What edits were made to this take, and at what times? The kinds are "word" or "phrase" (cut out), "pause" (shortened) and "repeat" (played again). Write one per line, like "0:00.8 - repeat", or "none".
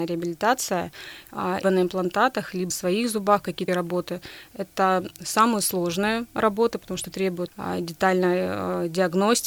0:01.6 - word
0:02.7 - word
0:03.7 - word
0:07.5 - word